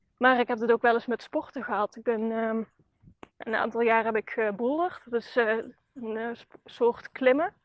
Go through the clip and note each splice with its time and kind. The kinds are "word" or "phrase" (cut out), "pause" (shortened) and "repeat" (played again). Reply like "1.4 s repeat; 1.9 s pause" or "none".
3.3 s pause